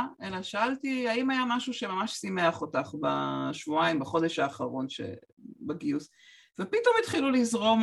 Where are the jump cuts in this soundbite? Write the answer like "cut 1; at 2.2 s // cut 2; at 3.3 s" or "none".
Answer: none